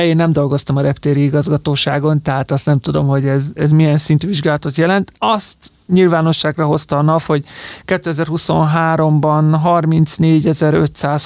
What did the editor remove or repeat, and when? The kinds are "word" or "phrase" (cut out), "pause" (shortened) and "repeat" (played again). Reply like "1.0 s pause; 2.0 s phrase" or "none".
3.6 s word